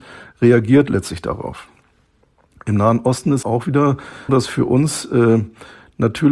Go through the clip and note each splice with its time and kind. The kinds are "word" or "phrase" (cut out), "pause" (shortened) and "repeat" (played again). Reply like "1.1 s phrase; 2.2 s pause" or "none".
3.4 s word; 4.3 s word